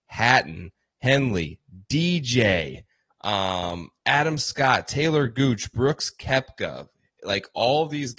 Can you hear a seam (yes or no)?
no